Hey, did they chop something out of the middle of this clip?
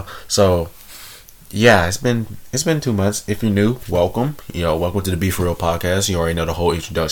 no; 0 cuts

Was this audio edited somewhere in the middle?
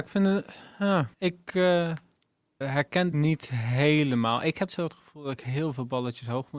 yes; 4 cuts; at 1.1 s, 2.6 s, 3.1 s, 4.7 s

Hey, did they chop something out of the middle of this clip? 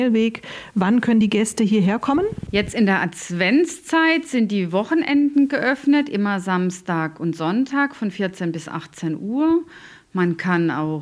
no; 0 cuts

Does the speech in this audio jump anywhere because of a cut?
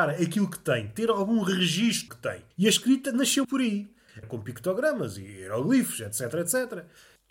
yes; 4 cuts; at 2.1 s, 2.5 s, 3.4 s, 4.2 s

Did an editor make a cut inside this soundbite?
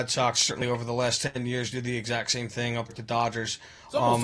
yes; 1 cut; at 2.9 s

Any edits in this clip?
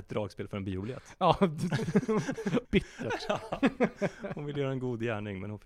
yes; 1 cut; at 2.7 s

